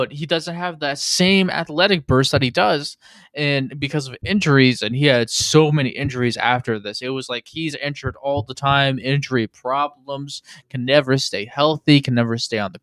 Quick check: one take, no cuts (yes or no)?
yes